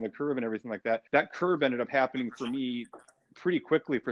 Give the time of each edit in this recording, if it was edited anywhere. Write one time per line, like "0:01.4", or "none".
0:01.1